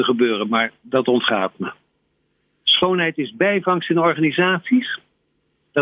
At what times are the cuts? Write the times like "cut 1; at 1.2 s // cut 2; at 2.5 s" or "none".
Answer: none